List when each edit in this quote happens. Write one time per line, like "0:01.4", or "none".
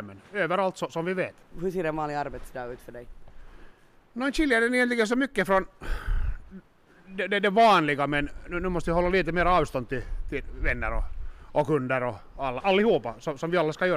0:12.6